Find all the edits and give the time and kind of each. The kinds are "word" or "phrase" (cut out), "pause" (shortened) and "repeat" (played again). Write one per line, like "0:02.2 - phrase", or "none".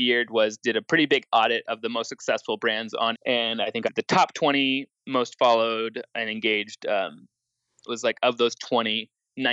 0:03.1 - word
0:03.8 - word
0:04.9 - pause
0:07.9 - phrase